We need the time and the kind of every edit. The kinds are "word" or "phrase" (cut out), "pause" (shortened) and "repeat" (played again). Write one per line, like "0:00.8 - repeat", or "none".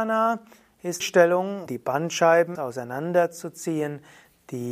0:01.0 - phrase
0:01.7 - word
0:02.5 - word